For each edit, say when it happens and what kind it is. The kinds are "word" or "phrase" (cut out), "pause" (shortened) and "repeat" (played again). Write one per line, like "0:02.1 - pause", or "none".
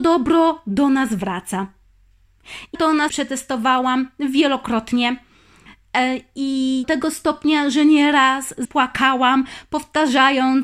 0:02.7 - word
0:03.1 - word
0:06.8 - word
0:08.6 - word

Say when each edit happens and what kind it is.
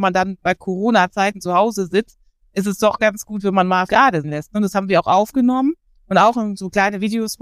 0:03.9 - word
0:04.2 - word

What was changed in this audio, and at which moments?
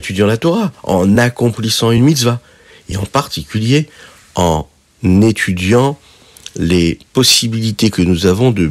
none

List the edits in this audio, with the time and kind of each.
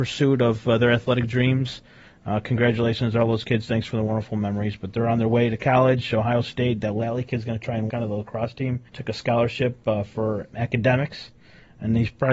0:07.9 - word
0:08.9 - pause
0:10.5 - word

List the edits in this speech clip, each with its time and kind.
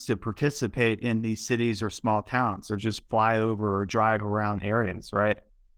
none

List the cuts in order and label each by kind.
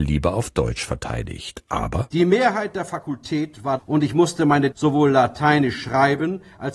0:03.8 - word
0:04.7 - word

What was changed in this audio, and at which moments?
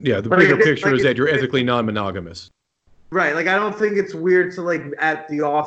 none

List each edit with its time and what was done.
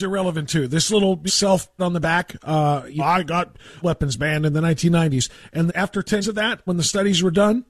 0:01.3 - word
0:01.8 - word
0:03.0 - word
0:03.8 - word
0:05.7 - word
0:06.2 - word
0:06.7 - word

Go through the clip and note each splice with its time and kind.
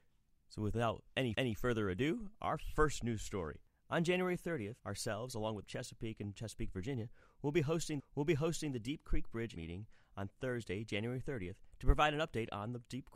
0:01.3 - repeat
0:04.8 - pause
0:05.6 - phrase
0:08.0 - repeat
0:09.6 - word

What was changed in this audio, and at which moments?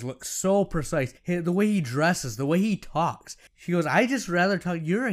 0:01.2 - pause
0:03.5 - pause

